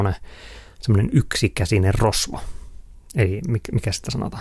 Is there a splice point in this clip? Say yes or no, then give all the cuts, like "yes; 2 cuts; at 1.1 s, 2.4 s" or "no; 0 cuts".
no; 0 cuts